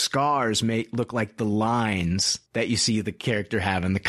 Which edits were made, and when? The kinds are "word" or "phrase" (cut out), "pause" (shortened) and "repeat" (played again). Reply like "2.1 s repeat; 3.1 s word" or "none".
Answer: 2.5 s pause